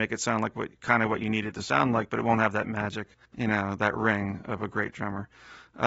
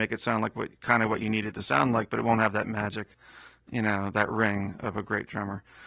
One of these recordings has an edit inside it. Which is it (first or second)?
first